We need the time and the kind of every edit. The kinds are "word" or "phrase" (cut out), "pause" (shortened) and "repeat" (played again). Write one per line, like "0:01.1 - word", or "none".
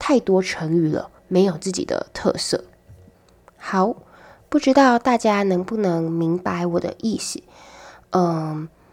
0:01.2 - pause